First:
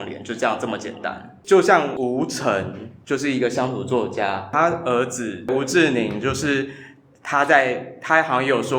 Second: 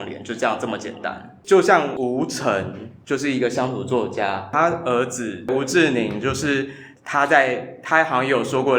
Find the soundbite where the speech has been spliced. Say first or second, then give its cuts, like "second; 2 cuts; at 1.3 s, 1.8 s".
second; 1 cut; at 7.0 s